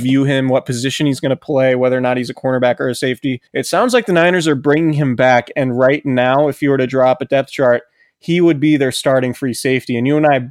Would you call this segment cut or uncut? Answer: cut